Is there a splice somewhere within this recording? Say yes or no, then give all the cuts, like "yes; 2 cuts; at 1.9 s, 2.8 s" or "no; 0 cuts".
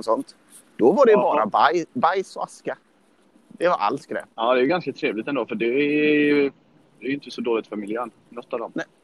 yes; 2 cuts; at 3.3 s, 4.3 s